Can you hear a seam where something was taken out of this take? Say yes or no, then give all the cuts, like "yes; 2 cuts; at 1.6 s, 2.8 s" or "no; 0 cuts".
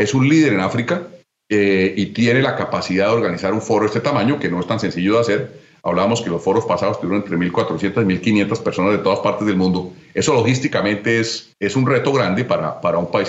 no; 0 cuts